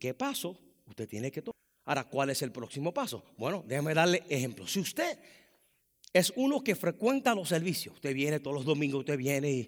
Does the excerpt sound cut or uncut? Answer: uncut